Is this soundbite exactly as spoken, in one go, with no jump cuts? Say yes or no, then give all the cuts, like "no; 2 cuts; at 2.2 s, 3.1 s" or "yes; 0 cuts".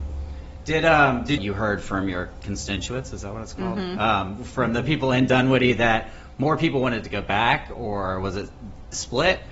no; 1 cut; at 1.4 s